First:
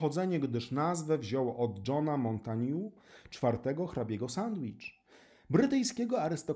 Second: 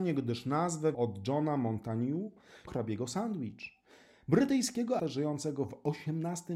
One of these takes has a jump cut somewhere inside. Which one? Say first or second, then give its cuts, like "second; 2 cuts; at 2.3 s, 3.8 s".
second; 3 cuts; at 0.9 s, 2.7 s, 5.0 s